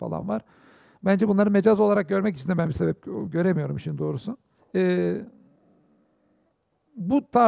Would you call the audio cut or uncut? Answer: cut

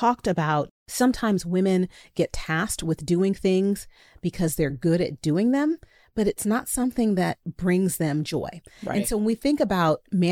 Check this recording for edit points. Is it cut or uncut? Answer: uncut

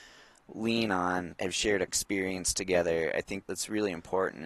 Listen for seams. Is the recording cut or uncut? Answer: cut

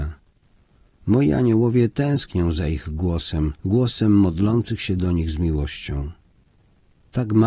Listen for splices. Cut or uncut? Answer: cut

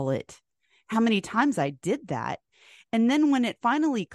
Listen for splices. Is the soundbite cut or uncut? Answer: uncut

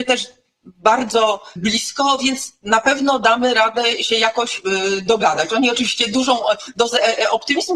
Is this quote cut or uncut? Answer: cut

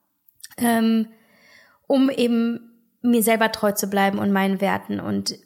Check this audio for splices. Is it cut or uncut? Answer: uncut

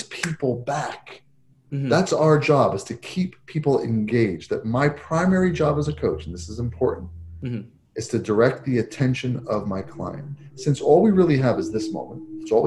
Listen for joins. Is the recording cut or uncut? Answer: uncut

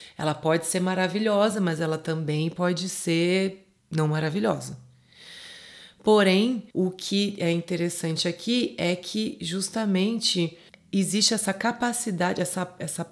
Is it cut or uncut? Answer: cut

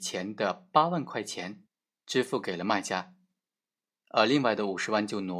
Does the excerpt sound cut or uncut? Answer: uncut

